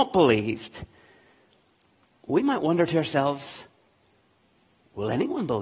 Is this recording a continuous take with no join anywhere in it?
yes; 0 cuts

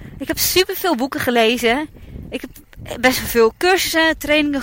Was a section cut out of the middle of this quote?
no; 0 cuts

